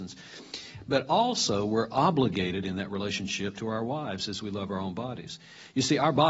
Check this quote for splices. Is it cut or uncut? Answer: uncut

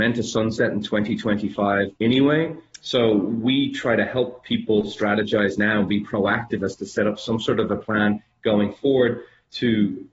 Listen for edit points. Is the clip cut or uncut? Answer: cut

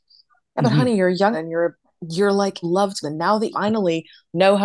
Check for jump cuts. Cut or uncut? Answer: cut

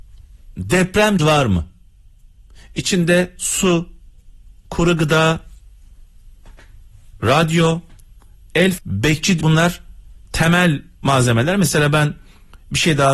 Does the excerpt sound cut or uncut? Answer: cut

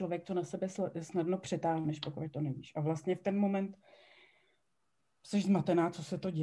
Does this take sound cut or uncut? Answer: uncut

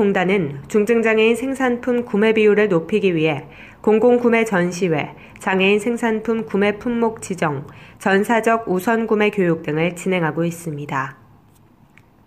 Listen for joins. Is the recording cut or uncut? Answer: uncut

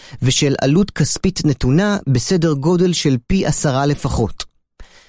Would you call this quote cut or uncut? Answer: uncut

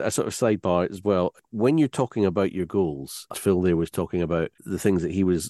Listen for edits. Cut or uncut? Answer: cut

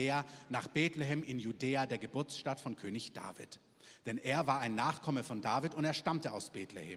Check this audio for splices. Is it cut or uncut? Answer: uncut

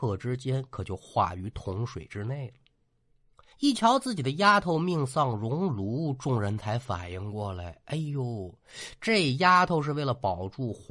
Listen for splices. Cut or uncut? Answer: cut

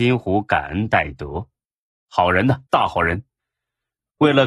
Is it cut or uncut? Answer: cut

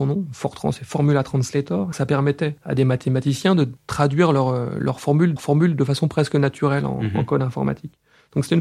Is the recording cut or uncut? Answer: cut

